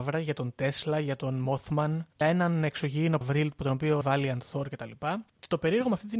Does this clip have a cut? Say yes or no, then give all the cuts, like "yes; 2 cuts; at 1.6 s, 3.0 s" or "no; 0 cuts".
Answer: yes; 4 cuts; at 2.2 s, 3.2 s, 4.0 s, 5.3 s